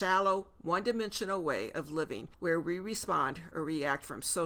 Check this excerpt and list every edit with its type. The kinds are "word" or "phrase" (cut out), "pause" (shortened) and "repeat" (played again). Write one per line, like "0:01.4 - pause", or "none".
0:02.3 - pause